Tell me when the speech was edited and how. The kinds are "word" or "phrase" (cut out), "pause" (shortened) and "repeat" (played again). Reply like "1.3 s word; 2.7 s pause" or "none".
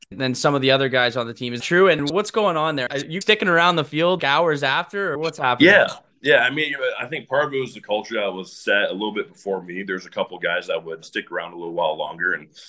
1.6 s word; 3.2 s word; 4.2 s word; 5.1 s word; 11.0 s word